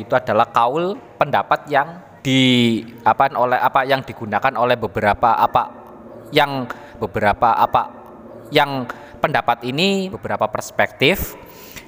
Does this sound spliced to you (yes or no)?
yes